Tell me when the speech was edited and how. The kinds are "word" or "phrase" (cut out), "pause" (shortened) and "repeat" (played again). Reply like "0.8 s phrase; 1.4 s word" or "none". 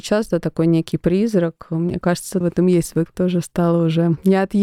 2.4 s word; 3.1 s word